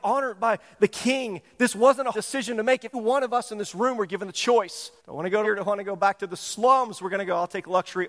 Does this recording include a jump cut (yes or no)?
yes